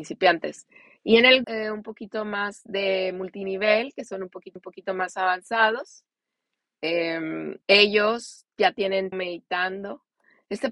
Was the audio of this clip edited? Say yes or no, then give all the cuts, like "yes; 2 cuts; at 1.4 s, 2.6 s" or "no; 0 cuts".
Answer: yes; 4 cuts; at 1.4 s, 4.6 s, 7.6 s, 9.1 s